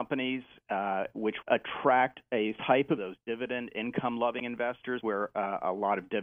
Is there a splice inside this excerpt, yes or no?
yes